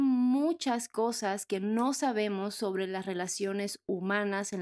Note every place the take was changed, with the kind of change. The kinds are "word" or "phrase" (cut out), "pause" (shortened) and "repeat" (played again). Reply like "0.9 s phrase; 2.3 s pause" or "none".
none